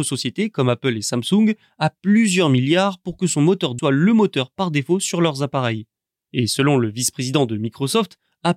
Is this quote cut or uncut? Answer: cut